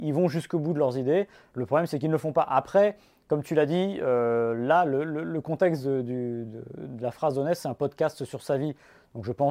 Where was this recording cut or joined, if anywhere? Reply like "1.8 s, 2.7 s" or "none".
none